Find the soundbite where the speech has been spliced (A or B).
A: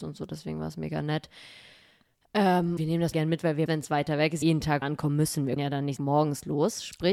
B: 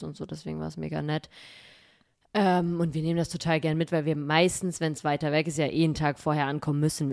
A